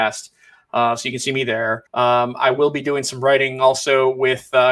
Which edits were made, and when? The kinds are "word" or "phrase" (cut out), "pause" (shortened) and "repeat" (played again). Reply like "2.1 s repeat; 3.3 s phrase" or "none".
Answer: 1.9 s pause

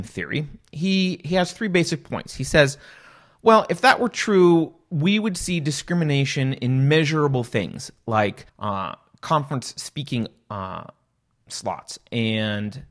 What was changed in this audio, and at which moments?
8.5 s pause

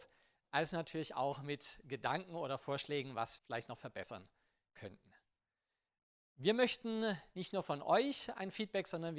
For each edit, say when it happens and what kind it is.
3.4 s word

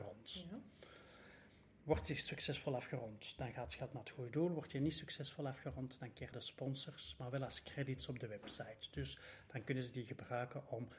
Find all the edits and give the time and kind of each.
6.3 s phrase

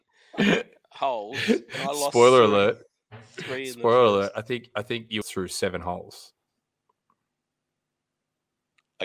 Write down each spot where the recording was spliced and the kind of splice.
5.2 s phrase

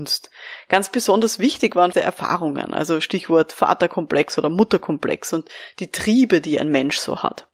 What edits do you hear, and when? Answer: 1.9 s phrase

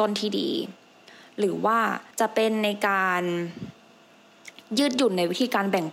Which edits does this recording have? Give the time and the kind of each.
2.1 s pause

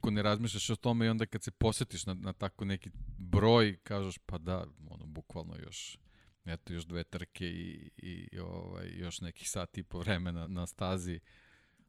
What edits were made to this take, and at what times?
1.3 s word; 10.4 s word

